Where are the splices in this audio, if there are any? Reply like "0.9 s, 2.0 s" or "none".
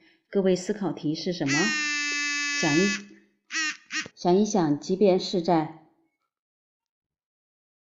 4.1 s